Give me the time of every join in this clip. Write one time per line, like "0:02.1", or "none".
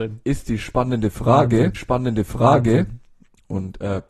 0:01.7